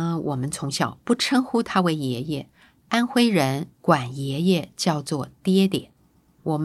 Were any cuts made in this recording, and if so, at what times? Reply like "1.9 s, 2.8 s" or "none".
3.7 s